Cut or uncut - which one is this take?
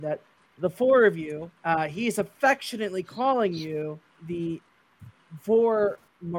cut